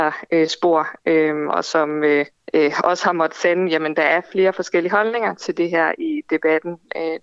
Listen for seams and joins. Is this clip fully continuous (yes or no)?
no